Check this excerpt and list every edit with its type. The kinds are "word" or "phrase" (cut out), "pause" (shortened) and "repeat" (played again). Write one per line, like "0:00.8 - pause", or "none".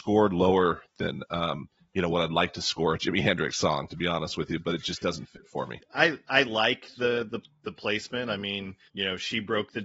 0:01.8 - pause
0:08.9 - pause

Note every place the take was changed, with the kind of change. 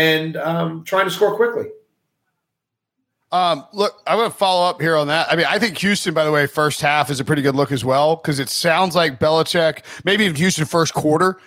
none

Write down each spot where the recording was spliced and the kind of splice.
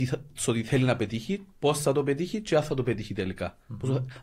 0:01.5 - pause

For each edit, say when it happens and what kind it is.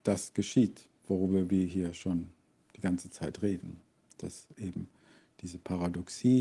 none

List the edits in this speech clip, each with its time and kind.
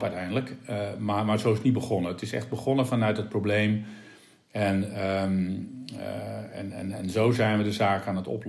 none

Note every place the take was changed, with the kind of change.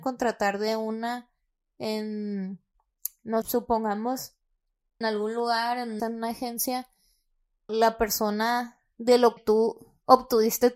0:03.4 - word
0:05.0 - word
0:06.0 - word
0:07.7 - word
0:09.4 - word

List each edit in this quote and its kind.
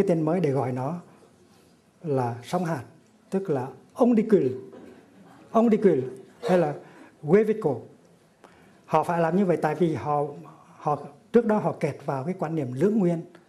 none

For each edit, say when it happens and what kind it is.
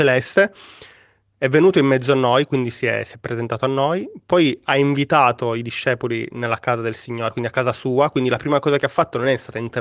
none

